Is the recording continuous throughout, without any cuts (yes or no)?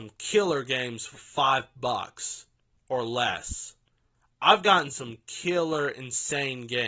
no